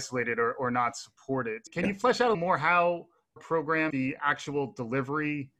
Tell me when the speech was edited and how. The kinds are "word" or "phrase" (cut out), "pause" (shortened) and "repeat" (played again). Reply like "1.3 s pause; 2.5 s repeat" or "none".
2.3 s word; 3.4 s word; 3.9 s phrase